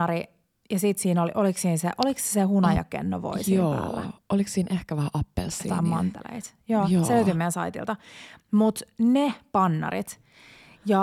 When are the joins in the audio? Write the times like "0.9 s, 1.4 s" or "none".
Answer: none